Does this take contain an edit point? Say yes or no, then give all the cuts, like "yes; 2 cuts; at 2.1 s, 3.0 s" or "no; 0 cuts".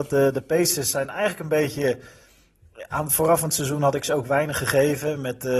no; 0 cuts